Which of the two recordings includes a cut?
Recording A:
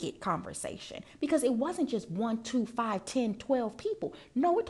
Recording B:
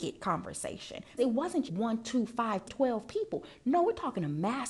B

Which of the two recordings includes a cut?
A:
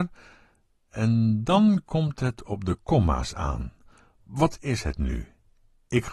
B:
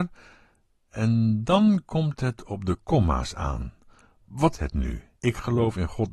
B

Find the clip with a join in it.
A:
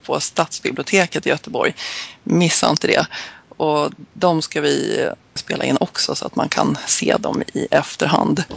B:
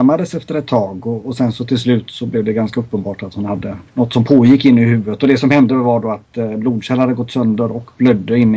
B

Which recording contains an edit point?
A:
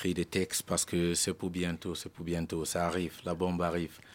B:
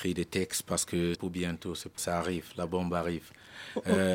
B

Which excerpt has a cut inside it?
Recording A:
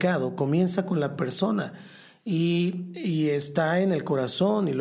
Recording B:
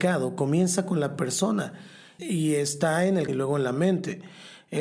B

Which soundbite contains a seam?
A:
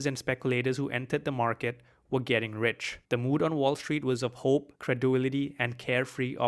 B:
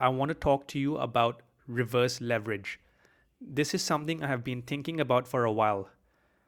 A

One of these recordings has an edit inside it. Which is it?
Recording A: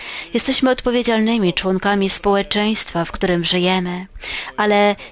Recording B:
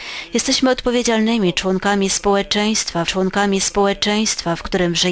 B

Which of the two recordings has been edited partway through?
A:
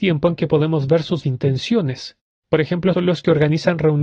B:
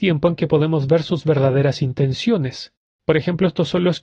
A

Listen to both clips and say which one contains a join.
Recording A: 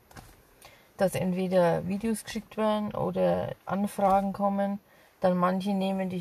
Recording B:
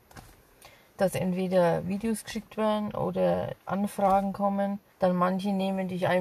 B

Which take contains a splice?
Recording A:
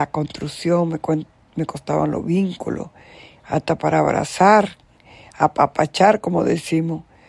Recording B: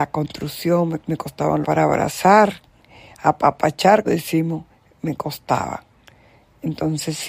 B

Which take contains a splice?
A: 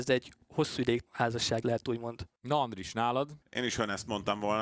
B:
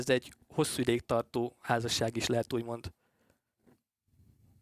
A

